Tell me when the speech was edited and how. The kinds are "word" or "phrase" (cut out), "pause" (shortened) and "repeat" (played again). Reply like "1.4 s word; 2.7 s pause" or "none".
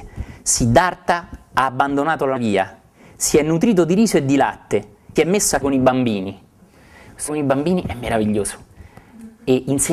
2.4 s word; 5.2 s word; 5.6 s word; 7.3 s word

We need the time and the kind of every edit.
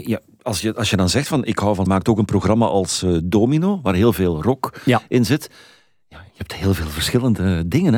1.9 s phrase

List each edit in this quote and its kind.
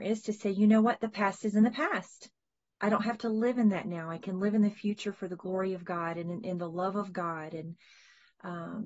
none

